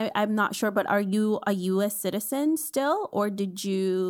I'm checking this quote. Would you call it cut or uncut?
uncut